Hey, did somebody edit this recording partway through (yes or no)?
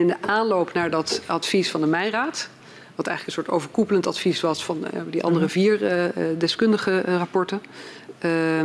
no